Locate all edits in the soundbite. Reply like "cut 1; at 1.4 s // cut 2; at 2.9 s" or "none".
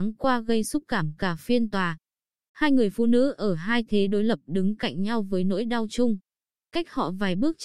none